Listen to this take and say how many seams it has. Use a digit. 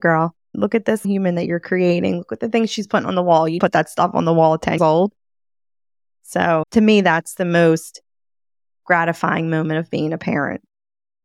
4